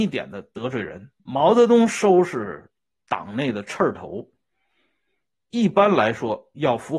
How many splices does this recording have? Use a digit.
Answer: 1